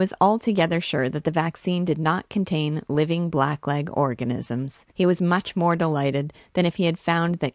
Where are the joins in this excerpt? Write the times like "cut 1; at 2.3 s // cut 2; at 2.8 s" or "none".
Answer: cut 1; at 4.9 s